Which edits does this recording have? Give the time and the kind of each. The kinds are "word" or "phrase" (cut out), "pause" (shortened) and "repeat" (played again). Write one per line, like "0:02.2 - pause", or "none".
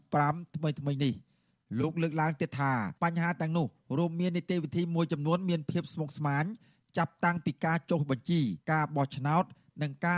0:03.0 - pause
0:08.6 - pause